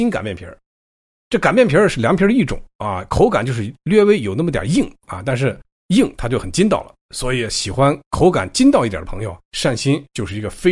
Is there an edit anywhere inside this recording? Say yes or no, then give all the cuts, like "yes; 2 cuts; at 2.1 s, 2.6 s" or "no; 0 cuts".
yes; 2 cuts; at 7.0 s, 9.4 s